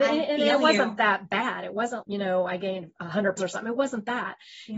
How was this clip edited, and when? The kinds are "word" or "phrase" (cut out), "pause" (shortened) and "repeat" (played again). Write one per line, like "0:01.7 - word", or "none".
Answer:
0:02.0 - word
0:03.4 - word